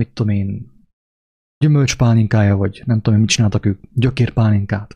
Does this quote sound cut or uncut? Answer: uncut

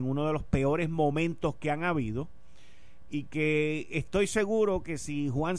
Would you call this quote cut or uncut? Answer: uncut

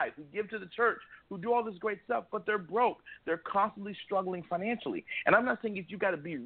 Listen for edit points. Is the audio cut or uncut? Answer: uncut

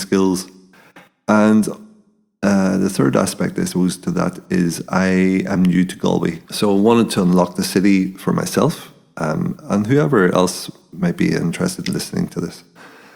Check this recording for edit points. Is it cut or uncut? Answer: cut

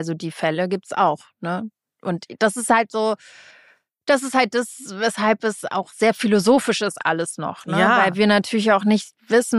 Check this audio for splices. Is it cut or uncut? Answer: uncut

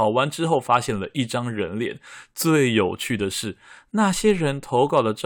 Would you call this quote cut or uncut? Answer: uncut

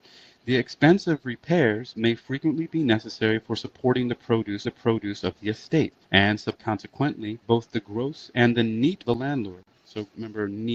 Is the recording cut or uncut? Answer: cut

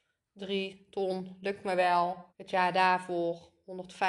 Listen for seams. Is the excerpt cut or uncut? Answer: cut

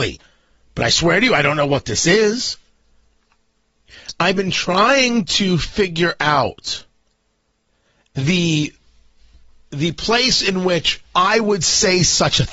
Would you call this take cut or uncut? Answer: cut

